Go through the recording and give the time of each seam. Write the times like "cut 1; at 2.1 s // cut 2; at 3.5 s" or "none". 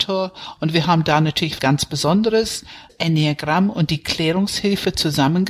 cut 1; at 1.6 s // cut 2; at 2.9 s